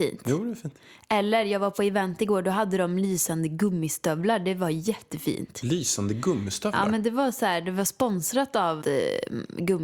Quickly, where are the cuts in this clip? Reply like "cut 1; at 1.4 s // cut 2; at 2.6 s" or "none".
cut 1; at 8.8 s